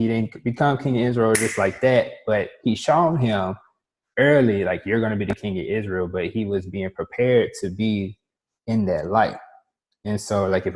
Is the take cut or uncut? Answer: uncut